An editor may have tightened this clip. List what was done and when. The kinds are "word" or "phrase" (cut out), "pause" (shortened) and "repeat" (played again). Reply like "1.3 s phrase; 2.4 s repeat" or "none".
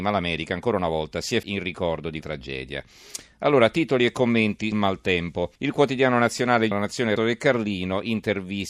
1.4 s word; 2.2 s word; 4.7 s word; 5.6 s pause; 6.7 s word; 7.2 s word